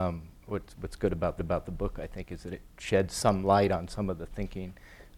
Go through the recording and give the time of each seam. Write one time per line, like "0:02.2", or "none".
0:01.4